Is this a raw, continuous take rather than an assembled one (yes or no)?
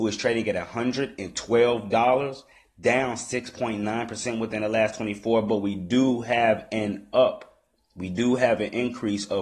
yes